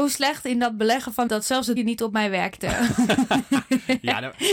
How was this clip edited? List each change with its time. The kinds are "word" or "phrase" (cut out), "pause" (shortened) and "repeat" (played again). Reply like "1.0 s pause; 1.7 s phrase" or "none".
1.3 s word; 1.8 s word

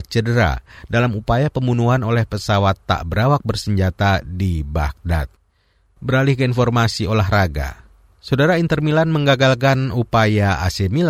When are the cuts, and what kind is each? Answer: none

